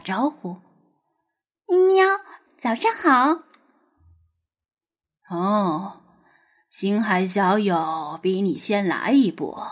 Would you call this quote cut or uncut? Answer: cut